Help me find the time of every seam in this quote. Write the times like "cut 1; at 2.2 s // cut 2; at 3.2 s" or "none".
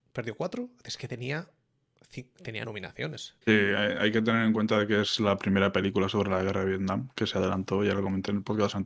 cut 1; at 2.6 s // cut 2; at 3.4 s

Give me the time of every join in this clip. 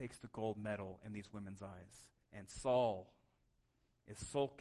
none

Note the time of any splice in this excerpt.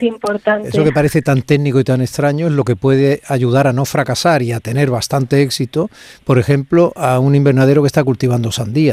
none

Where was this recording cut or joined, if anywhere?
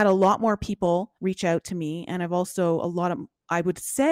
cut 1; at 1.2 s

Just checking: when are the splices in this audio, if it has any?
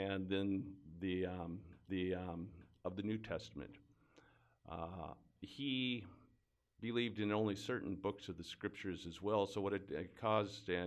cut 1; at 1.9 s

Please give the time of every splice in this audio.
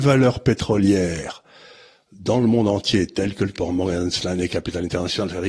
cut 1; at 3.5 s

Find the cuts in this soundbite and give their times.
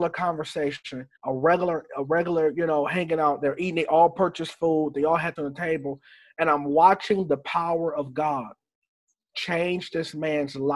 cut 1; at 1.2 s // cut 2; at 5.4 s

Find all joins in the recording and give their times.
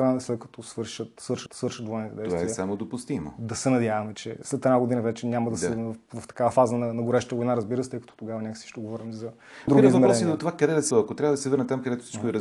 cut 1; at 1.5 s // cut 2; at 9.7 s // cut 3; at 10.9 s

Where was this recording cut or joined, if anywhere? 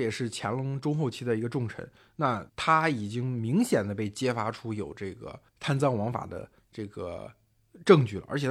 cut 1; at 2.5 s // cut 2; at 5.5 s

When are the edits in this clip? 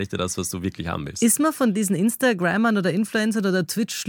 none

